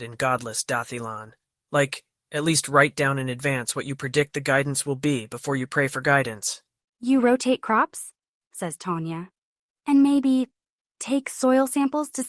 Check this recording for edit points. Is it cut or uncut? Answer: uncut